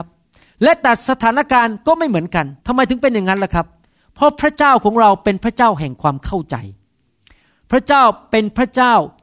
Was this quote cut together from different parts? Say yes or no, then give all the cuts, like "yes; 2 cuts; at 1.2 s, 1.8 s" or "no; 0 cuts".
yes; 1 cut; at 2.6 s